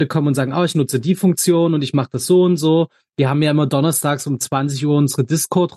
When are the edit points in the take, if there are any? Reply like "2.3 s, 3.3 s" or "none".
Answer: none